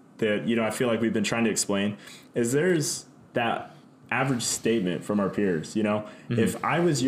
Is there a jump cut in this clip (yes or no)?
no